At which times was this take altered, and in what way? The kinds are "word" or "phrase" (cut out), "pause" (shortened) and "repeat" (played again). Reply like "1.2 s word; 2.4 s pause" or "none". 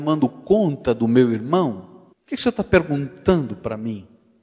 2.1 s pause

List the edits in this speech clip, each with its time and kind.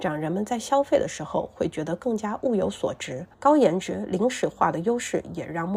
3.3 s pause

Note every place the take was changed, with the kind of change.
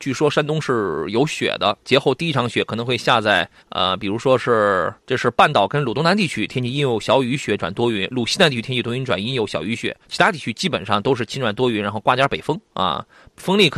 3.6 s pause; 5.0 s pause; 10.0 s pause; 12.7 s pause

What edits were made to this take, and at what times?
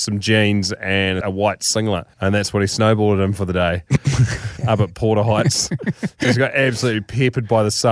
1.2 s word; 2.1 s pause

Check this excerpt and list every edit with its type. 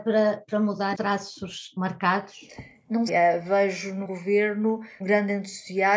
0.9 s word; 1.8 s word; 3.1 s word; 4.0 s word; 5.0 s word

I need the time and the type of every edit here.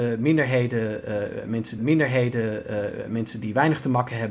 1.8 s repeat

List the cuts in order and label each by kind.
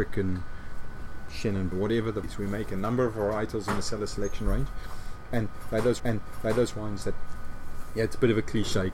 1.7 s phrase; 2.2 s word; 6.0 s repeat

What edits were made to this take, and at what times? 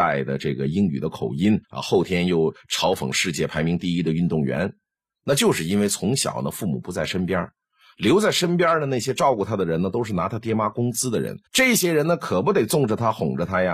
1.6 s pause; 11.5 s pause

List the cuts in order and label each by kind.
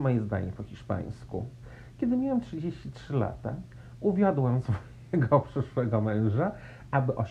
none

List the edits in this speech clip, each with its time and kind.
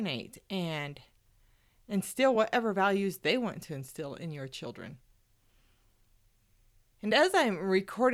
none

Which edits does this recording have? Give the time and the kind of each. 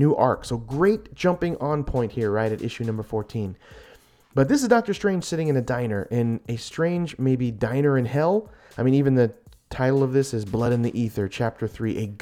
none

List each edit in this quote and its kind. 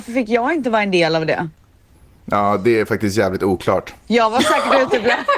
none

